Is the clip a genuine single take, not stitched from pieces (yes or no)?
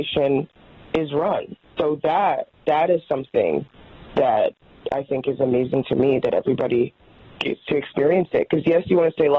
yes